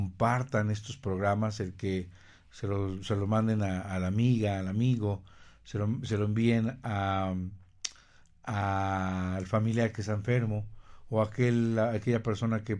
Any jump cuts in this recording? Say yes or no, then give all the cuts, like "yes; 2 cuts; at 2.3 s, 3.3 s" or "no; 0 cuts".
no; 0 cuts